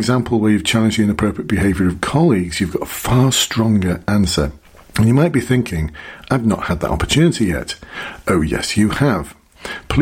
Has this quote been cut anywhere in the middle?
yes; 1 cut; at 4.6 s

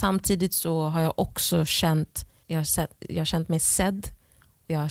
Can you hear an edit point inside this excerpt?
yes; 1 cut; at 2.4 s

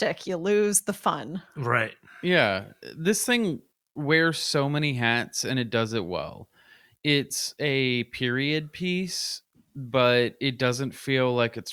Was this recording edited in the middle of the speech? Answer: no; 0 cuts

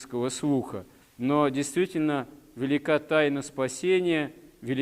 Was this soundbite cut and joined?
no; 0 cuts

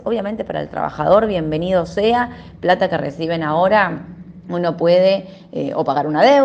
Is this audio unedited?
yes; 0 cuts

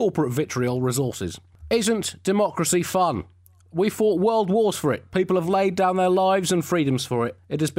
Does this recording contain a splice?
no; 0 cuts

